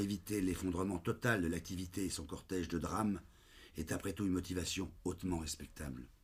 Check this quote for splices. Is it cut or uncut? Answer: uncut